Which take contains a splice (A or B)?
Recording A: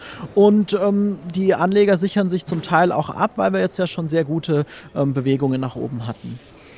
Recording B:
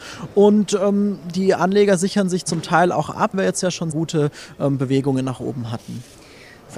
B